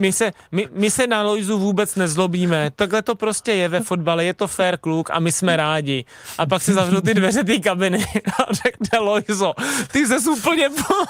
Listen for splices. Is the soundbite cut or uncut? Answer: uncut